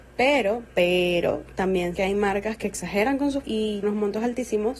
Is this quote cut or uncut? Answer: cut